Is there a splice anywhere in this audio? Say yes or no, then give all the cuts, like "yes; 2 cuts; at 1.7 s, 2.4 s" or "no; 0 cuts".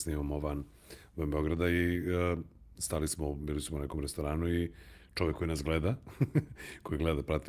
no; 0 cuts